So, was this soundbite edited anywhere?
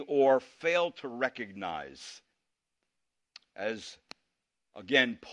no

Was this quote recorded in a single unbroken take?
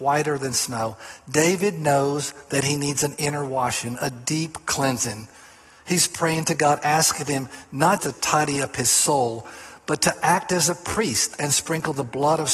no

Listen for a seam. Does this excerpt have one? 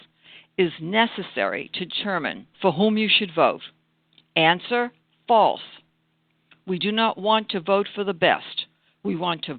yes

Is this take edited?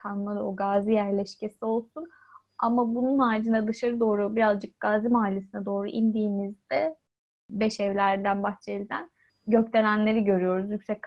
no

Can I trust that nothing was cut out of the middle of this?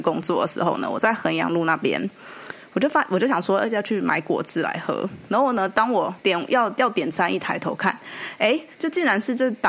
no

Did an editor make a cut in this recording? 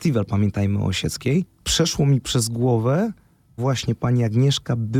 yes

